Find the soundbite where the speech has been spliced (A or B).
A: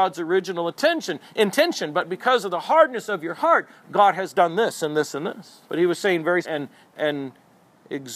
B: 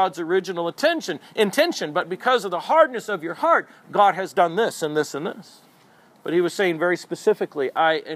A